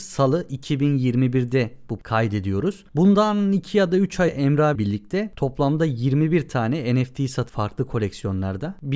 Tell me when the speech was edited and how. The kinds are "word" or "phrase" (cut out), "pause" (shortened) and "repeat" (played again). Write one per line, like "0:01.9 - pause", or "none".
0:02.0 - word
0:04.3 - word
0:04.8 - word
0:07.5 - word